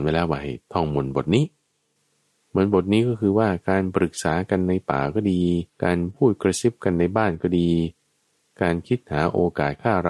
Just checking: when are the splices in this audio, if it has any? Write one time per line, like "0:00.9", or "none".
0:05.7